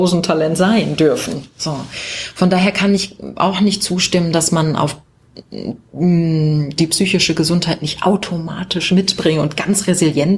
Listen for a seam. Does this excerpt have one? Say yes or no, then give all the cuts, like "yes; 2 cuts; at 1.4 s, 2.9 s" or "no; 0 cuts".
yes; 1 cut; at 6.8 s